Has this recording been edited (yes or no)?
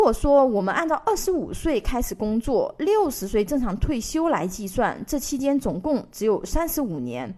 no